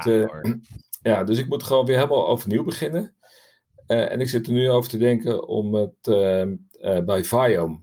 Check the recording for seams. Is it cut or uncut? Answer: uncut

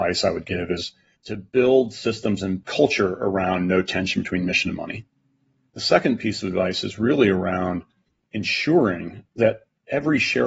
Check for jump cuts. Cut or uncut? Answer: uncut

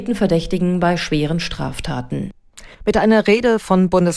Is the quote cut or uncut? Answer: cut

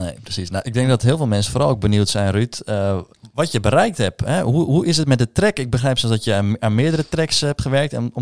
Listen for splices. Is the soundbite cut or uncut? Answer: uncut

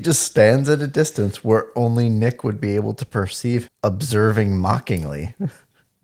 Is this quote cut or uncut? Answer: cut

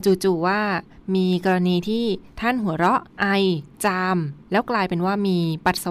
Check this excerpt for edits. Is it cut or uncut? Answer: cut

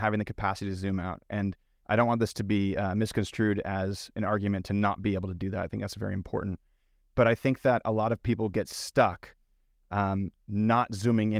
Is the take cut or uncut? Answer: uncut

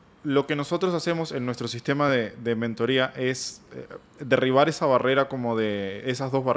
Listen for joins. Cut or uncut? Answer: uncut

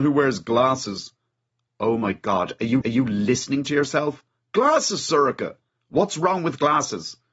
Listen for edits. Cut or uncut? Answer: cut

